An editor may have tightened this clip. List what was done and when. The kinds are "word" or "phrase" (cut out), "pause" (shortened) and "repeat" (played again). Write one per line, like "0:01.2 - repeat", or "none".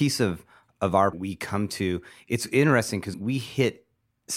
0:01.1 - phrase
0:03.1 - word